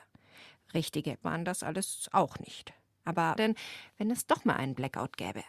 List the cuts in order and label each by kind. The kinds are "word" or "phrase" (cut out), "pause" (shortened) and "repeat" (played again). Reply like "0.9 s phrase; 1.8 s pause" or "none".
1.2 s word; 3.4 s phrase